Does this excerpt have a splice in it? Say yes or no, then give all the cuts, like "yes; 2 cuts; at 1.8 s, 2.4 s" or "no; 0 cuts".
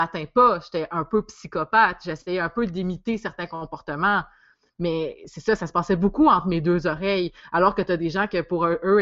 no; 0 cuts